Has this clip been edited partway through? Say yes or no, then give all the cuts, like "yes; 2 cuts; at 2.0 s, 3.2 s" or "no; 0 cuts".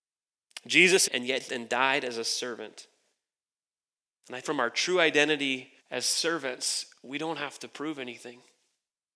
yes; 4 cuts; at 1.1 s, 1.5 s, 4.4 s, 5.8 s